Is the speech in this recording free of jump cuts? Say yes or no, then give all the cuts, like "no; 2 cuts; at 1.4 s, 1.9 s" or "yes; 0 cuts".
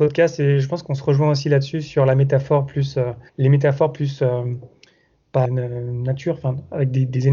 no; 2 cuts; at 3.3 s, 5.4 s